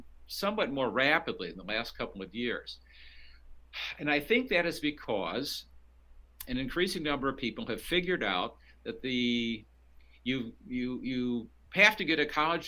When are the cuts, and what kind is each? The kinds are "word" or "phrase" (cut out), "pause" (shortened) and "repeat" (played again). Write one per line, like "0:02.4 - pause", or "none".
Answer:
none